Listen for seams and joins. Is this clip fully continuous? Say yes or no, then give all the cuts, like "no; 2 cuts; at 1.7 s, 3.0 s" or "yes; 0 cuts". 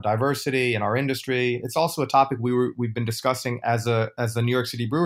yes; 0 cuts